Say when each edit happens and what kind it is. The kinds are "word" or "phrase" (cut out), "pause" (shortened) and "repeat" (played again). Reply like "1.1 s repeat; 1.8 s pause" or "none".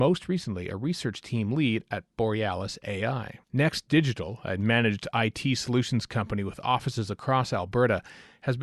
3.4 s pause